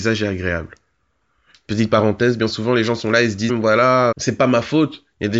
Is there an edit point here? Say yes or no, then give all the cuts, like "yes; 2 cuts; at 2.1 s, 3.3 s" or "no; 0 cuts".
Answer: yes; 2 cuts; at 3.5 s, 4.1 s